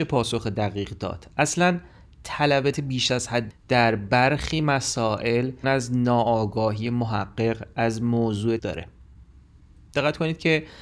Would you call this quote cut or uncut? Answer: cut